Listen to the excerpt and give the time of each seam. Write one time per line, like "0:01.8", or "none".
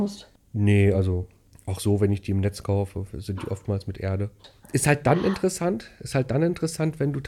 none